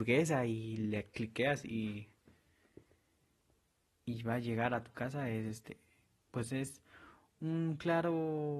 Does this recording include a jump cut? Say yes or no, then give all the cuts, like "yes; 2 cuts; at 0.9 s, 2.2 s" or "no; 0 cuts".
no; 0 cuts